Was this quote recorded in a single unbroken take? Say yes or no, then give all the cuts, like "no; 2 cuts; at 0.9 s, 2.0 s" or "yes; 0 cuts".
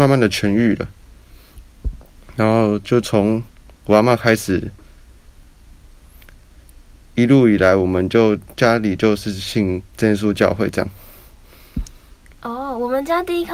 no; 1 cut; at 9.9 s